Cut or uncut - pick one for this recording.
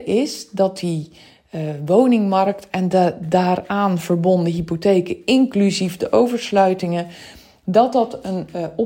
uncut